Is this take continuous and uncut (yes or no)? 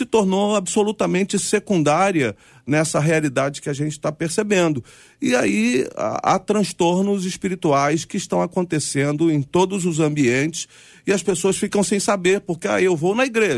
yes